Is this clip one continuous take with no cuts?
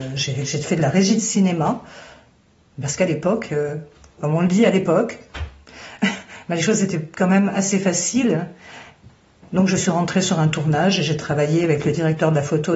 yes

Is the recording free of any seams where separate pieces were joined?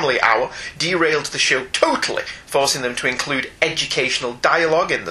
yes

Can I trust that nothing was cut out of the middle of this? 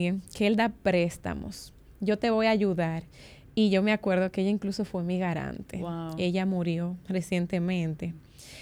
yes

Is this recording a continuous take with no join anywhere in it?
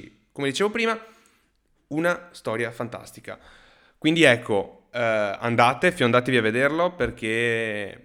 yes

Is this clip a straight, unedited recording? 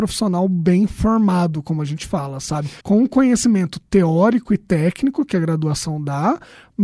no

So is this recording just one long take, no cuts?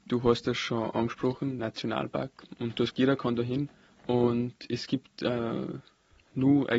no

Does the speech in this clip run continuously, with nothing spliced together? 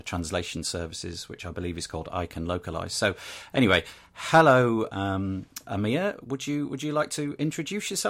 yes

